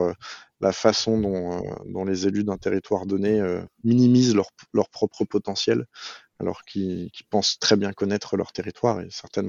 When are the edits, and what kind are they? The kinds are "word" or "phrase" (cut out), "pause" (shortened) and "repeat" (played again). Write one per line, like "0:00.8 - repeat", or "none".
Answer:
none